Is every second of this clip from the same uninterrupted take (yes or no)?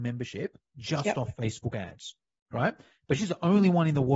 yes